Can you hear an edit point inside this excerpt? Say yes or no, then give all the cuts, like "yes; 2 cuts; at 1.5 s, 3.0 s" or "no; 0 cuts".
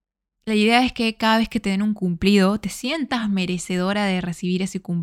no; 0 cuts